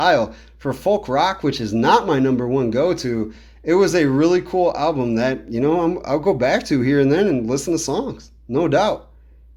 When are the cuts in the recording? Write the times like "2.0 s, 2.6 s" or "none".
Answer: none